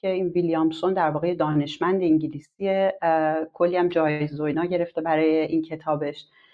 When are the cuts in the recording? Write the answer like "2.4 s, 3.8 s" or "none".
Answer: none